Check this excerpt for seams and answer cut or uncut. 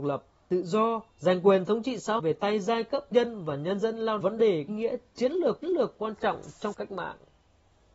cut